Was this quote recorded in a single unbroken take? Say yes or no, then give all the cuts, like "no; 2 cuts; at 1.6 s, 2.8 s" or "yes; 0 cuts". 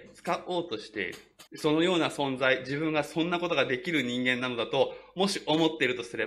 no; 1 cut; at 1.5 s